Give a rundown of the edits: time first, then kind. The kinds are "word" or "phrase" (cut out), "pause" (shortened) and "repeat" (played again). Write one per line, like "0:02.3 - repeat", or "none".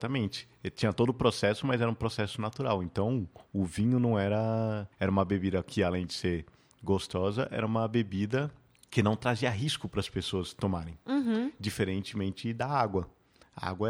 0:04.9 - pause
0:08.8 - pause